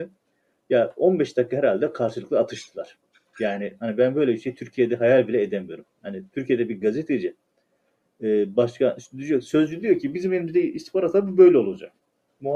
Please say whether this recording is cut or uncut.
uncut